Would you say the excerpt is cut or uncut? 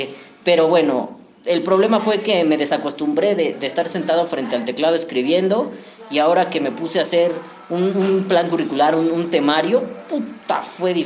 cut